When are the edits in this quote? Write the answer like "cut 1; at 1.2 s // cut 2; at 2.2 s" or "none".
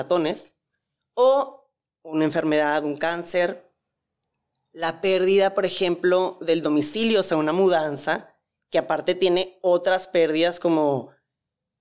none